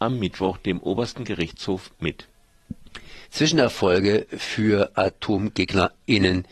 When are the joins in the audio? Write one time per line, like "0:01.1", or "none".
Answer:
0:03.2